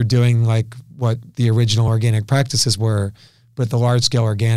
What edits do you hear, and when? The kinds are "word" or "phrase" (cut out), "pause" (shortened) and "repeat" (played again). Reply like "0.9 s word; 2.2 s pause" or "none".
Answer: none